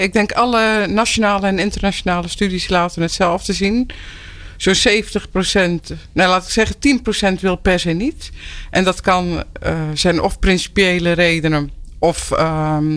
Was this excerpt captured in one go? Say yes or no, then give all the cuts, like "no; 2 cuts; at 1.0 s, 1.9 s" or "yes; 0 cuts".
yes; 0 cuts